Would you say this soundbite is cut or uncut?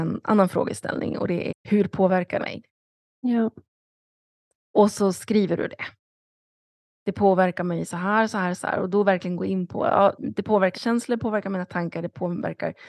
cut